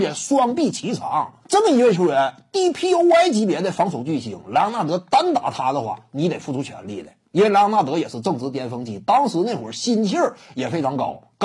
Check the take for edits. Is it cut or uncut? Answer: cut